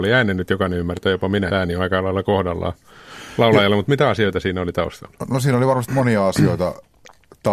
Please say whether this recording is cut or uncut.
cut